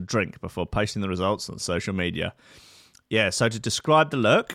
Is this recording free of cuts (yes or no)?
yes